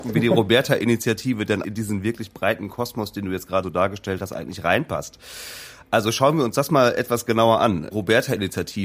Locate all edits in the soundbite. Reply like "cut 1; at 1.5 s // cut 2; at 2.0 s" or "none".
cut 1; at 1.6 s // cut 2; at 3.6 s